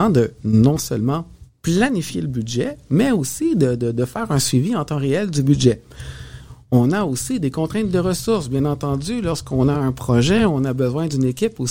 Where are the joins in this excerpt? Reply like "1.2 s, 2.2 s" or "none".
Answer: none